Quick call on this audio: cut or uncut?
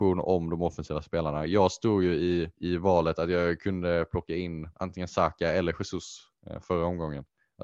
cut